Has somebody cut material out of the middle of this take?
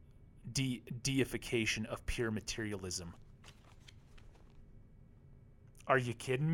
no; 0 cuts

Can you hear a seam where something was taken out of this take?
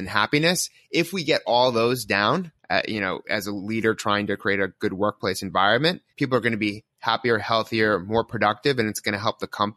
yes; 2 cuts; at 2.6 s, 6.1 s

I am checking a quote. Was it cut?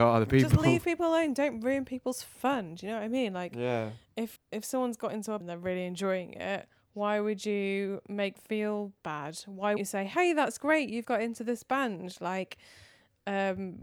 yes; 5 cuts; at 4.4 s, 5.4 s, 8.4 s, 9.8 s, 11.0 s

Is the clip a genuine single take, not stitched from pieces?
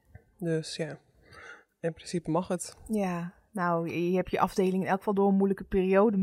yes; 0 cuts

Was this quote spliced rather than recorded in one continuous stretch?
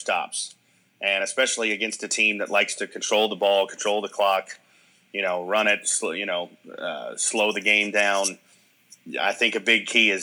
no; 0 cuts

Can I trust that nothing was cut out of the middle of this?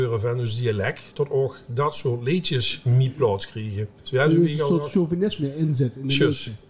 no; 1 cut; at 3.9 s

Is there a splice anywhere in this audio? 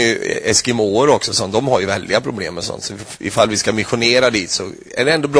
no; 0 cuts

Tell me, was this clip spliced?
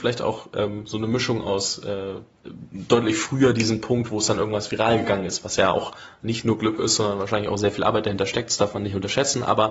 no; 0 cuts

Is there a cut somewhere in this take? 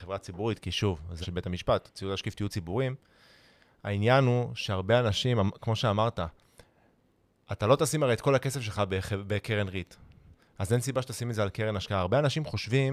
yes; 1 cut; at 1.2 s

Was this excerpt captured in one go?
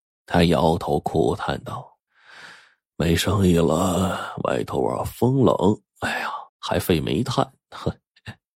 no; 2 cuts; at 2.1 s, 6.5 s

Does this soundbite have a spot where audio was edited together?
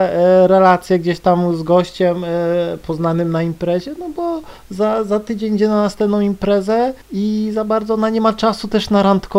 yes; 1 cut; at 7.0 s

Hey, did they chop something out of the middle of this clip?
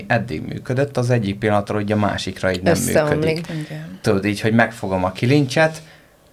no; 0 cuts

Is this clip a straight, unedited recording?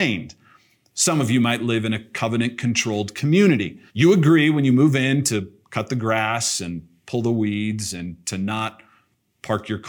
no; 1 cut; at 3.9 s

